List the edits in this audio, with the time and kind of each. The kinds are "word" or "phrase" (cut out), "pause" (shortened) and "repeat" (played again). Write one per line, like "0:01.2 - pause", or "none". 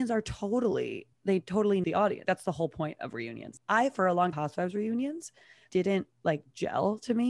0:01.1 - pause
0:01.8 - word
0:02.2 - word
0:04.3 - phrase
0:05.7 - phrase